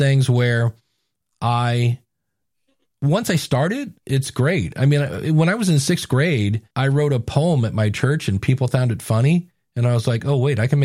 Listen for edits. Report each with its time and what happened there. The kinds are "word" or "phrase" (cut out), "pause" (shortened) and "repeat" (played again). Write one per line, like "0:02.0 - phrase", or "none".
0:06.7 - pause